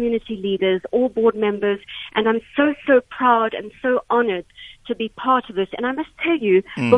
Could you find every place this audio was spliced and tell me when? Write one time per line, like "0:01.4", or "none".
none